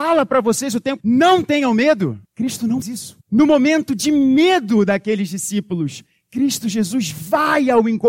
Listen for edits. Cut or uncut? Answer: cut